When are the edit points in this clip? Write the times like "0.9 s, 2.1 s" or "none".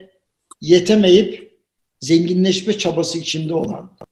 none